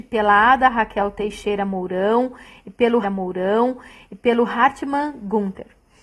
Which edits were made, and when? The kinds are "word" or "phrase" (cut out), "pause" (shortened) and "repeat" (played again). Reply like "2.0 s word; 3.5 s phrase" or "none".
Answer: 3.0 s repeat